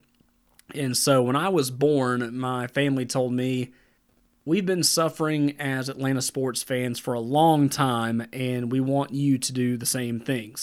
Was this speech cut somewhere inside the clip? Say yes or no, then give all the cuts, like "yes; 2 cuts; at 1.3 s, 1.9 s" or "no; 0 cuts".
yes; 1 cut; at 4.0 s